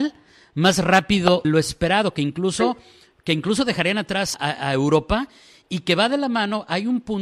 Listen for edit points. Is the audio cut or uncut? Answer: cut